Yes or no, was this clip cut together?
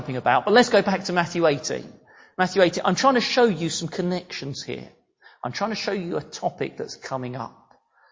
no